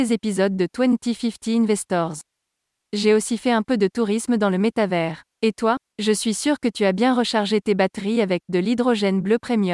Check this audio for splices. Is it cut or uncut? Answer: cut